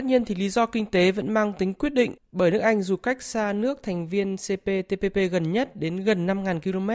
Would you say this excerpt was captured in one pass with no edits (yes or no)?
no